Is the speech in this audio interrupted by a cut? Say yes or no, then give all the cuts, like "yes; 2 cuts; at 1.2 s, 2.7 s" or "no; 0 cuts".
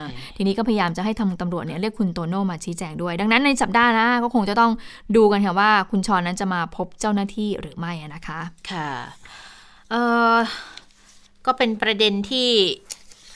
no; 0 cuts